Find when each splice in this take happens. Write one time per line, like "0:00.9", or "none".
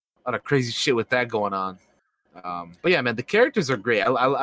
0:02.8